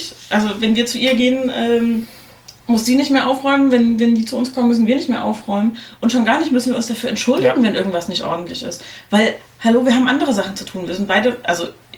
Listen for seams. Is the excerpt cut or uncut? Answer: cut